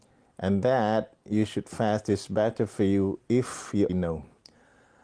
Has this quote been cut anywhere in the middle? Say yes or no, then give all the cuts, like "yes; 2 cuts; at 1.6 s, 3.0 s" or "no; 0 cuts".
yes; 1 cut; at 3.9 s